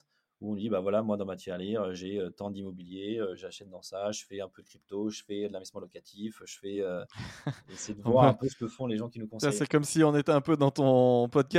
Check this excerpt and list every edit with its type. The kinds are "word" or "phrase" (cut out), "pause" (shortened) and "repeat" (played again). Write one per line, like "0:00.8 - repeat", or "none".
none